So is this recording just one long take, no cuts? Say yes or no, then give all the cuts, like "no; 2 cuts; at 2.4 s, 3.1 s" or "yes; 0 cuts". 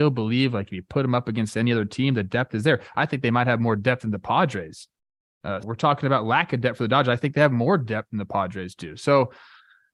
no; 1 cut; at 5.6 s